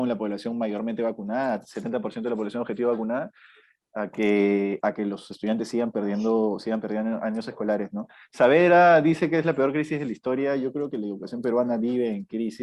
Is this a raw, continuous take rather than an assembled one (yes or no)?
yes